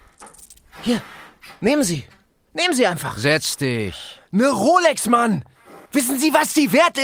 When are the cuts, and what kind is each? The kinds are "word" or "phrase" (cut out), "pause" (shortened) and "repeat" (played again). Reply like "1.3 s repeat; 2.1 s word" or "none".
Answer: 4.3 s pause; 5.9 s pause

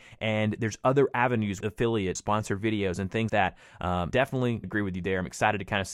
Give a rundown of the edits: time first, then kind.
1.6 s word; 2.2 s word; 3.3 s word; 4.1 s word; 4.6 s word

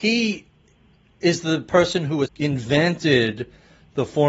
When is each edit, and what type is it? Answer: 2.3 s word

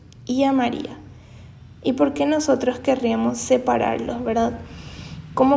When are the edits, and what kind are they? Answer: none

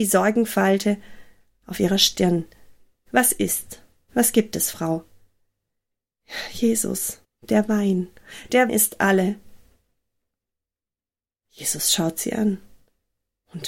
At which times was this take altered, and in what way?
7.2 s pause; 8.7 s word

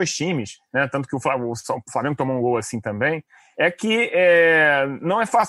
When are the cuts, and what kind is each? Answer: none

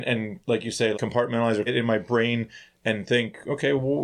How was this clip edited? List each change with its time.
0.9 s word; 1.7 s word

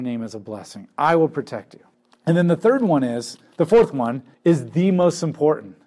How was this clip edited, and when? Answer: 1.9 s pause; 4.3 s pause

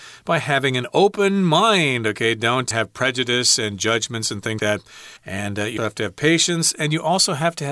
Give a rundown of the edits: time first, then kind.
2.7 s word; 4.6 s word; 5.2 s pause; 5.8 s word

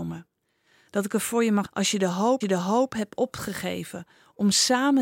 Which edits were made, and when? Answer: 1.6 s word; 2.4 s repeat

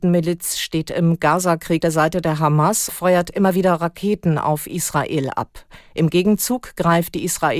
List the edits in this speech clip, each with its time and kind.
1.8 s word; 2.9 s word

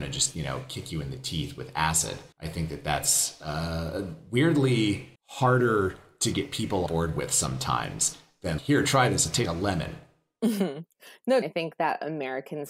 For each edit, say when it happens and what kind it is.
2.3 s pause; 5.2 s pause; 6.9 s word; 8.6 s word; 9.5 s word; 11.4 s phrase

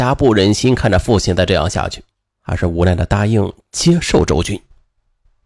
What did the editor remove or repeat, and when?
none

